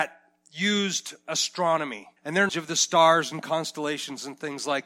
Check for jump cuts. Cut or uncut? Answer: cut